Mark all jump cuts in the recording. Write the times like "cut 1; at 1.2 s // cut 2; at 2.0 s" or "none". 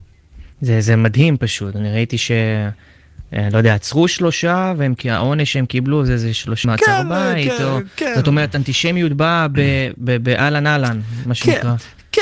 cut 1; at 6.6 s